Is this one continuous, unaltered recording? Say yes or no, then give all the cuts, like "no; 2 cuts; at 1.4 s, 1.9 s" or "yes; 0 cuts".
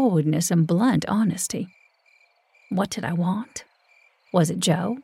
yes; 0 cuts